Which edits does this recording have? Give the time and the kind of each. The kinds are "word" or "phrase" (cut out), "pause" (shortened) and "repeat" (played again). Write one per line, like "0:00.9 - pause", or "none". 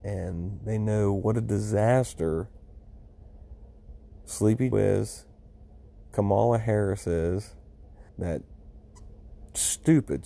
0:04.7 - word
0:08.1 - pause